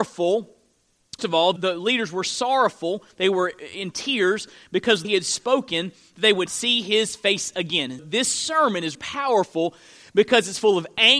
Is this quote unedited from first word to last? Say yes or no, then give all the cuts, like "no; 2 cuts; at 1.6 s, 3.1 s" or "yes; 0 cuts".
no; 6 cuts; at 1.2 s, 1.6 s, 5.0 s, 6.5 s, 8.0 s, 8.9 s